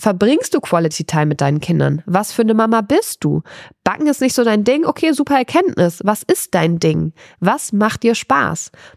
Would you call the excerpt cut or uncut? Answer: uncut